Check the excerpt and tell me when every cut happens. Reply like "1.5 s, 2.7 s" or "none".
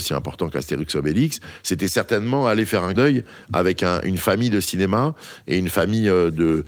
3.0 s